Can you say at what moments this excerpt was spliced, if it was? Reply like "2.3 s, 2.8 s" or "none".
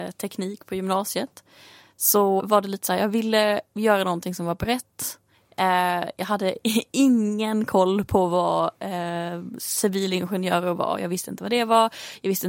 2.4 s, 3.7 s, 5.3 s